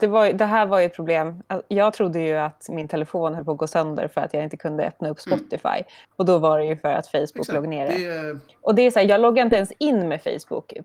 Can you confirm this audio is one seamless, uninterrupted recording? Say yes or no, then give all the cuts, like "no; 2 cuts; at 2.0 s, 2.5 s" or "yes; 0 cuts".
yes; 0 cuts